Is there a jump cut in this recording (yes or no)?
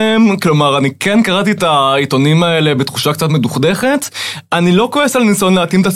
no